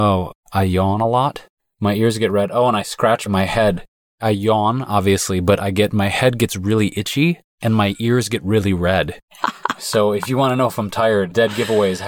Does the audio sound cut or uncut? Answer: uncut